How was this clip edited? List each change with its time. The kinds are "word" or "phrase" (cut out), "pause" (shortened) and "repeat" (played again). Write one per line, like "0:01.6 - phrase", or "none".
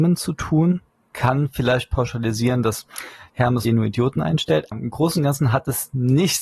0:01.1 - word
0:03.6 - phrase
0:04.7 - word